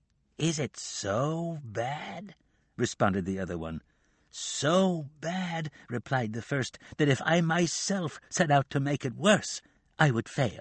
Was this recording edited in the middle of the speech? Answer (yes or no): no